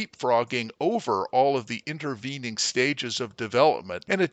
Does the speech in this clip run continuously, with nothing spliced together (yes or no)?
yes